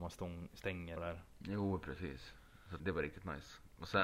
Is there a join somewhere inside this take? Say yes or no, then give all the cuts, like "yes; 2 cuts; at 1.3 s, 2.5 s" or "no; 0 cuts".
yes; 2 cuts; at 1.0 s, 2.8 s